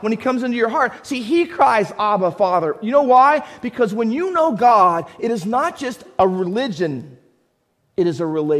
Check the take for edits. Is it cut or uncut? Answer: uncut